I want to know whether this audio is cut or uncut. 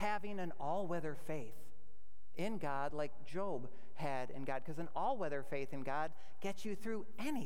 uncut